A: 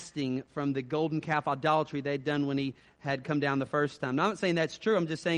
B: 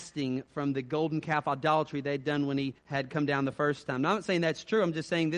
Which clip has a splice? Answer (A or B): B